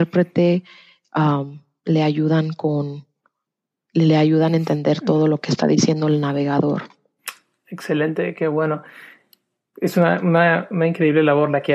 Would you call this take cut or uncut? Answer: uncut